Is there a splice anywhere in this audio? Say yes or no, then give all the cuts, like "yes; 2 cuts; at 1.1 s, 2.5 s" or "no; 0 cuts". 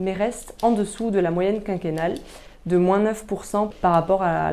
no; 0 cuts